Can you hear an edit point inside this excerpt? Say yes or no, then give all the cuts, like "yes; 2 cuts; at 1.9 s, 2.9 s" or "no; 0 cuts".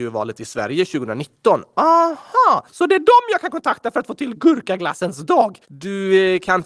yes; 2 cuts; at 2.7 s, 5.6 s